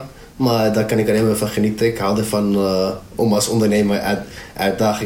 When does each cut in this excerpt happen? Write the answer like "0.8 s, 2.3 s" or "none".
none